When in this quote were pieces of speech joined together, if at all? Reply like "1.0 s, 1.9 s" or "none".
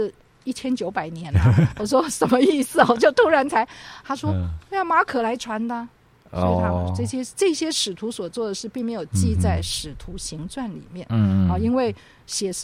none